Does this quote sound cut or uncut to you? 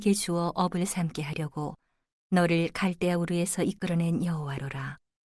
uncut